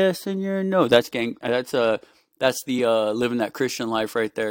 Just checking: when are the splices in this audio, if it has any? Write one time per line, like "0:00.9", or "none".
none